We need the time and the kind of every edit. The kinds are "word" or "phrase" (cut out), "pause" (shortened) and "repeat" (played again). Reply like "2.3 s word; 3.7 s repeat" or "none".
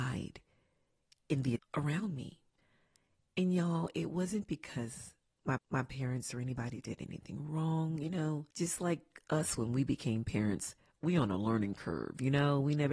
1.6 s word; 2.6 s pause; 5.6 s repeat; 8.5 s pause